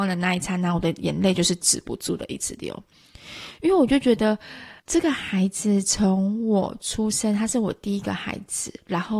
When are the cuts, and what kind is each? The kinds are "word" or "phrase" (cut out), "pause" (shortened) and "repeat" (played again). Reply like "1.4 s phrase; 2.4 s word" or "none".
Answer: 4.8 s pause